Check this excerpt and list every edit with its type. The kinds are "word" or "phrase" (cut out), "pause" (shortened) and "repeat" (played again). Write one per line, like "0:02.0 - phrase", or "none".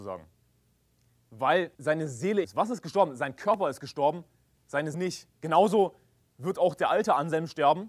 0:01.7 - pause
0:02.4 - phrase
0:04.9 - word
0:05.3 - pause